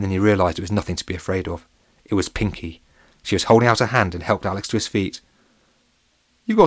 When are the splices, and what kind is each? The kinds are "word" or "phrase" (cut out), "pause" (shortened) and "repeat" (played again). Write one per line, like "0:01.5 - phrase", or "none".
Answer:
none

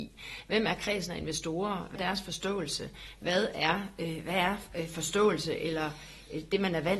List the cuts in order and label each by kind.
0:02.0 - word

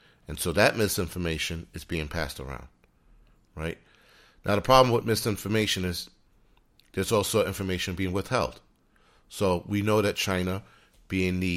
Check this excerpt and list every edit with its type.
none

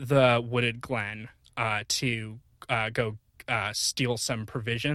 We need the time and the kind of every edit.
none

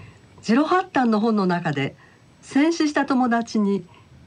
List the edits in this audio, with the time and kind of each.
none

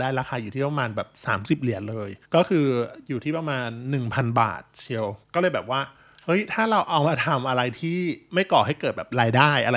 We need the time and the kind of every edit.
0:02.2 - pause
0:05.2 - pause

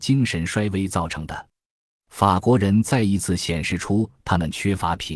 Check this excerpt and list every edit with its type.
none

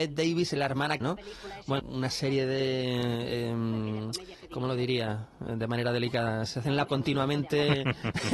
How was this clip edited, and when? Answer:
0:01.0 - phrase
0:01.8 - phrase
0:06.9 - word

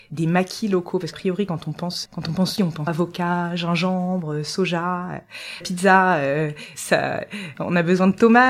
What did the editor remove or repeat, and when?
0:01.1 - word
0:02.1 - word
0:02.6 - word
0:02.9 - word
0:05.6 - word
0:06.7 - word

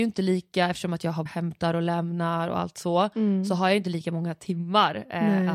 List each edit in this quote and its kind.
0:01.3 - word

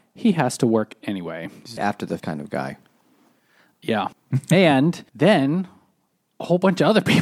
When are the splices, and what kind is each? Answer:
0:01.8 - word
0:02.2 - word
0:04.1 - pause
0:05.1 - pause

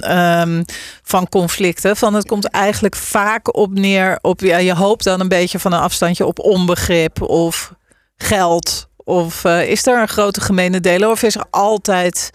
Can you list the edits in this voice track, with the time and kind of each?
none

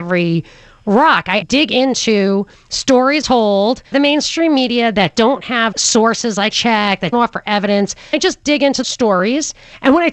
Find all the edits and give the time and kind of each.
0:01.4 - word
0:03.2 - word
0:03.9 - word
0:05.7 - word
0:06.5 - word
0:07.1 - word
0:08.1 - word
0:08.8 - word

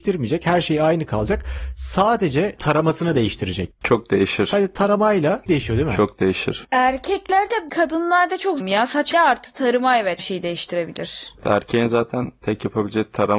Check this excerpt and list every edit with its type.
0:02.6 - word
0:05.5 - word
0:07.7 - word
0:08.6 - word
0:09.1 - word
0:10.2 - word

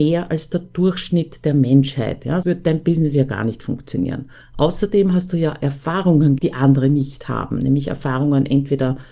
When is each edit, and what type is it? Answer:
0:02.4 - word
0:04.4 - pause
0:06.4 - word

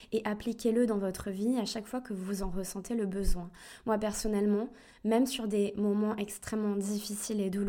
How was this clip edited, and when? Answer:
none

